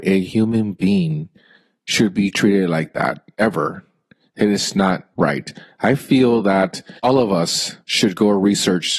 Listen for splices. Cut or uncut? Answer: cut